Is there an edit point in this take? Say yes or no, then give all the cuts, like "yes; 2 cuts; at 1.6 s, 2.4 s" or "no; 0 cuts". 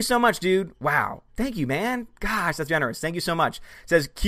yes; 2 cuts; at 1.3 s, 2.7 s